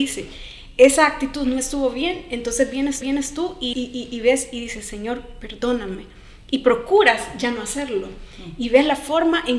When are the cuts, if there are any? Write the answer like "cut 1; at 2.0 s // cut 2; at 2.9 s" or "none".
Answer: cut 1; at 3.0 s // cut 2; at 3.7 s